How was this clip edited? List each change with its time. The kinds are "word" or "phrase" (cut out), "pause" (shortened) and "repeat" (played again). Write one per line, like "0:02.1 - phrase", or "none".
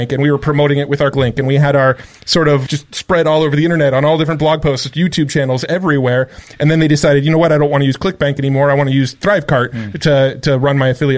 0:01.1 - word
0:02.7 - phrase